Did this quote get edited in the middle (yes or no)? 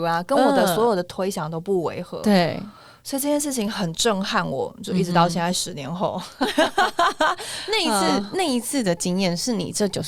no